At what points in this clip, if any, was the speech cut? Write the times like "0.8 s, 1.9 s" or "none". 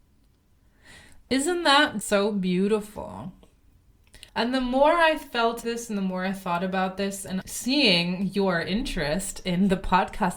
2.0 s, 4.3 s, 5.6 s, 7.4 s